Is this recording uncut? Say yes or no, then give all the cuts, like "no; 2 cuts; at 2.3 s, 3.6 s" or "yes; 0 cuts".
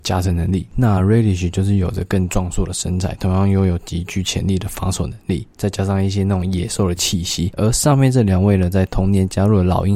yes; 0 cuts